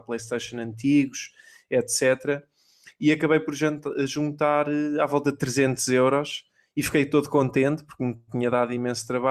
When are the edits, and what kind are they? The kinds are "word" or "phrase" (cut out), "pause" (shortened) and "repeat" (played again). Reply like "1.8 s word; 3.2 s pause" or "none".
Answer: none